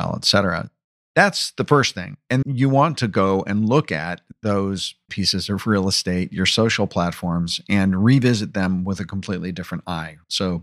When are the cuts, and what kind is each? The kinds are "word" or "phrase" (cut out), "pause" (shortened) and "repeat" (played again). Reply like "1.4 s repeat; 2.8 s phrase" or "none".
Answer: 2.4 s word; 5.1 s word